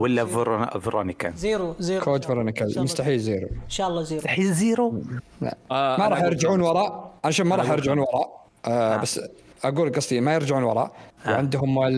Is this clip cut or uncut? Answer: uncut